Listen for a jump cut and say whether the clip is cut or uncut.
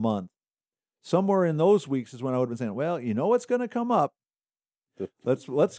uncut